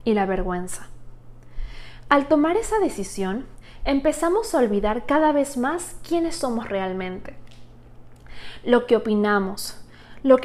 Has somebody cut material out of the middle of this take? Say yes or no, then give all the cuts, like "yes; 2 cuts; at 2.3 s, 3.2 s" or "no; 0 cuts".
no; 0 cuts